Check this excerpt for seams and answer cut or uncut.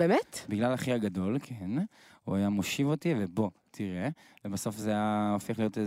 uncut